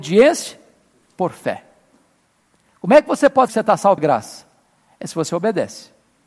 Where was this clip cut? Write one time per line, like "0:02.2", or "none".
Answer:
0:03.5
0:04.0